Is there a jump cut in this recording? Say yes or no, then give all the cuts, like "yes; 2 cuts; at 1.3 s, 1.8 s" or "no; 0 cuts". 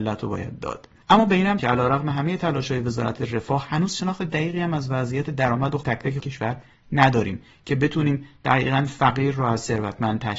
yes; 3 cuts; at 1.6 s, 5.8 s, 6.2 s